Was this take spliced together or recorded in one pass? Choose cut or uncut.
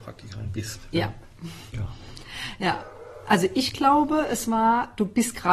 uncut